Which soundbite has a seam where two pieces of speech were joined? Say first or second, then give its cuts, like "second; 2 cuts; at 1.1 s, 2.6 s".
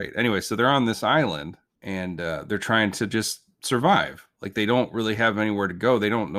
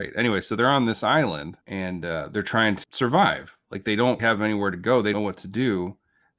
second; 4 cuts; at 1.6 s, 2.8 s, 4.2 s, 5.1 s